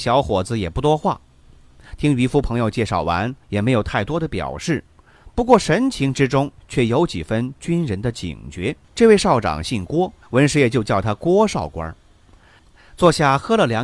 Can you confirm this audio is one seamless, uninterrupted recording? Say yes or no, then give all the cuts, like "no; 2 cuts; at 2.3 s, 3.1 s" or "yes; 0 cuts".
no; 2 cuts; at 8.8 s, 10.2 s